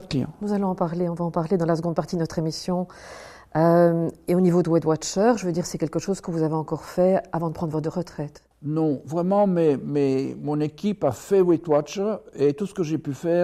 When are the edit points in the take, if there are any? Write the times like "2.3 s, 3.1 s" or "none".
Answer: 8.5 s